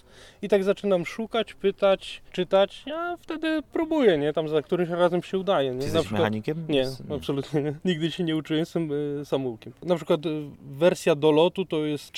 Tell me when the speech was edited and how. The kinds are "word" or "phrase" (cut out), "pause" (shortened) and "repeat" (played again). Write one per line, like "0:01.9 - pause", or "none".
0:02.3 - pause